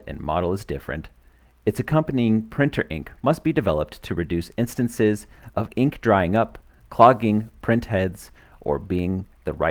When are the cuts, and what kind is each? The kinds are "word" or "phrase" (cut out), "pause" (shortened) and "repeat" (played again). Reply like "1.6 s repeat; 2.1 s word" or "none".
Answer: none